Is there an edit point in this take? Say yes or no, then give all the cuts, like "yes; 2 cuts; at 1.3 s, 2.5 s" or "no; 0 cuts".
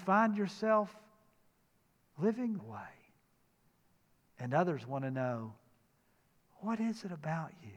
yes; 1 cut; at 2.6 s